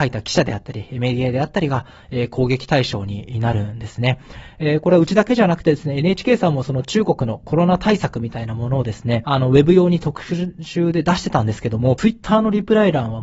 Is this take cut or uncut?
uncut